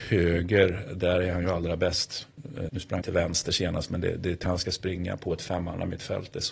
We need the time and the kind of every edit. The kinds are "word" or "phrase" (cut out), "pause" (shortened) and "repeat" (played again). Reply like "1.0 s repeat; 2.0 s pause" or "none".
2.7 s word; 3.0 s word; 4.4 s word